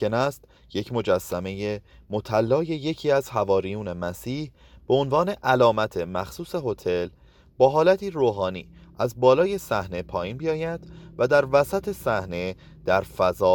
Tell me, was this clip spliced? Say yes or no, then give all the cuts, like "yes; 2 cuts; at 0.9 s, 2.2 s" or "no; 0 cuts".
no; 0 cuts